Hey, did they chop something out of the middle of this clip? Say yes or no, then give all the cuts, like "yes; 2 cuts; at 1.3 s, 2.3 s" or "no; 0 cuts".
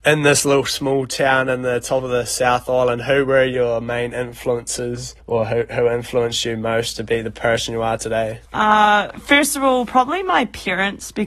yes; 2 cuts; at 5.2 s, 8.5 s